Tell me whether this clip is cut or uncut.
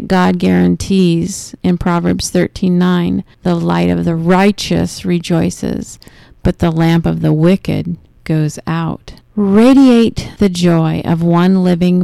cut